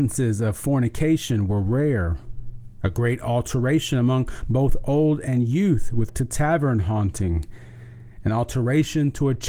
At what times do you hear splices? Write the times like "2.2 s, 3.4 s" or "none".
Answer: 6.1 s